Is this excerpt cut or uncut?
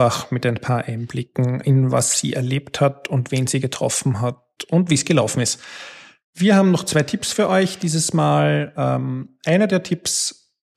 uncut